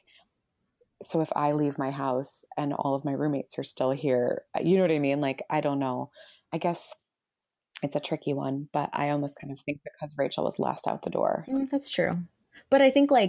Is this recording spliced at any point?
no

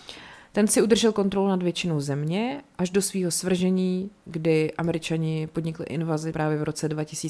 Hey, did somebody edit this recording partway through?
yes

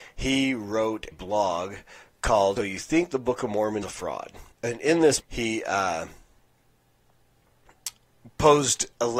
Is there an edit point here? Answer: yes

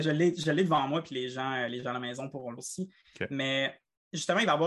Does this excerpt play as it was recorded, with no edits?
no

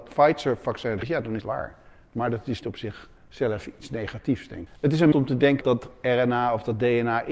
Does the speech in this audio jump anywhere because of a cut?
yes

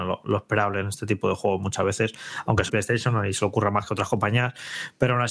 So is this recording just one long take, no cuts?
no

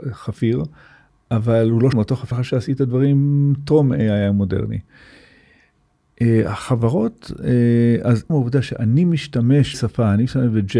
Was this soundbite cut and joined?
yes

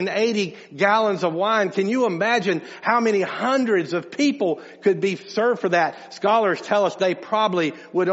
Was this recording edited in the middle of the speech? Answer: no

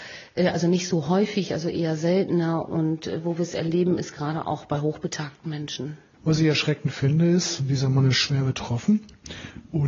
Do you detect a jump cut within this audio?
no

